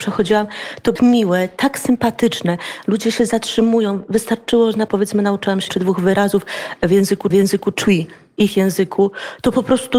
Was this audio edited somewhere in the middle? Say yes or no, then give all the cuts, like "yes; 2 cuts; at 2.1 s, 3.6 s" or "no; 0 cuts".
yes; 4 cuts; at 1.0 s, 4.9 s, 5.7 s, 7.3 s